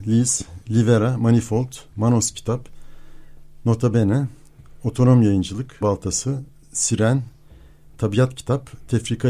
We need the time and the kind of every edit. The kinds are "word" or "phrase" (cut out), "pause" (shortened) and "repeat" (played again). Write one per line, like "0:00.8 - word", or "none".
0:05.8 - word